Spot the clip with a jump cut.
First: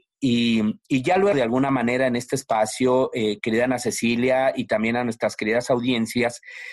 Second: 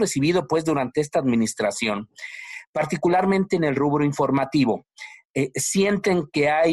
first; 1 cut; at 1.3 s

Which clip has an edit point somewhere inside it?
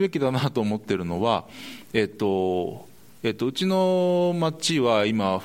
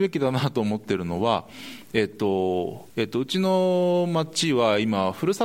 second; 1 cut; at 2.9 s

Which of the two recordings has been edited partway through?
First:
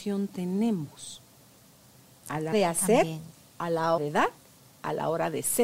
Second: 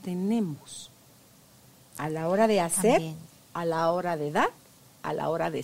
first; 2 cuts; at 2.5 s, 4.0 s

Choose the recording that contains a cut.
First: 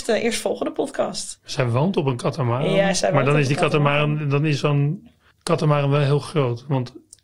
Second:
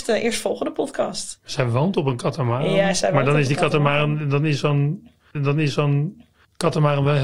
second; 1 cut; at 5.4 s

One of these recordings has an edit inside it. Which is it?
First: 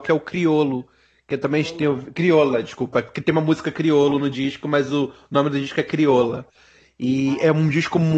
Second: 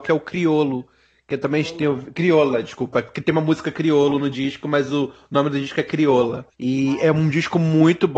second; 1 cut; at 6.5 s

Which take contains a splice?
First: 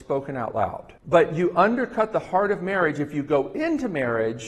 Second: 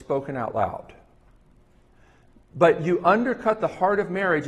first; 1 cut; at 1.0 s

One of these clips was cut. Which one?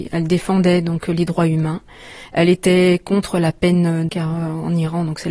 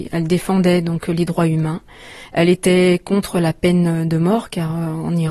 first; 1 cut; at 4.1 s

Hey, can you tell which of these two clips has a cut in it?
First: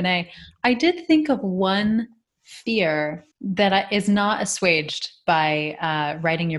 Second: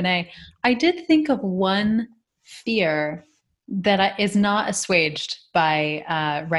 first; 1 cut; at 3.3 s

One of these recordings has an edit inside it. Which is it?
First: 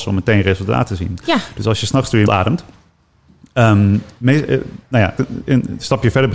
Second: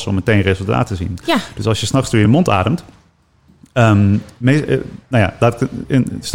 first; 2 cuts; at 2.3 s, 5.2 s

